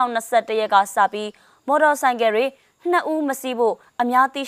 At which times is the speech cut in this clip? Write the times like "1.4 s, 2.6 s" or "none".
none